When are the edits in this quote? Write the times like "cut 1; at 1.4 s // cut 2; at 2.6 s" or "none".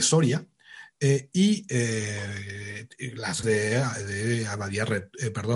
cut 1; at 3.4 s